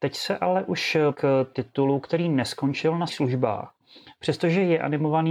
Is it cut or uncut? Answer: cut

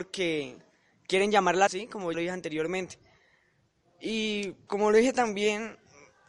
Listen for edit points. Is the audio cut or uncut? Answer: cut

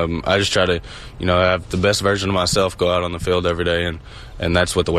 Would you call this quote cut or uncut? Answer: uncut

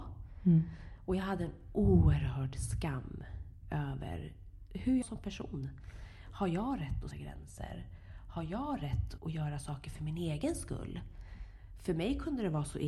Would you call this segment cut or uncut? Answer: cut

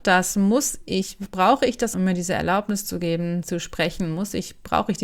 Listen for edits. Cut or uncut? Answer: cut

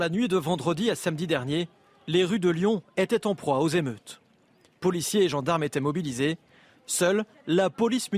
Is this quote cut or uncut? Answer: uncut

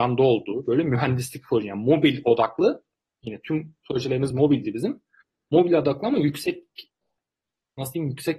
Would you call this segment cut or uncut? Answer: uncut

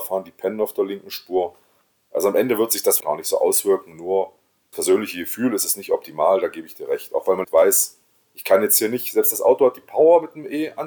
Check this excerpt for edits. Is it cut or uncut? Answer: cut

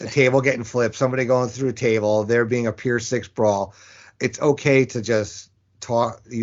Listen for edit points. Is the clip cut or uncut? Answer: uncut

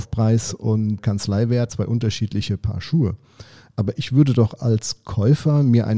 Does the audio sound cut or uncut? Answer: cut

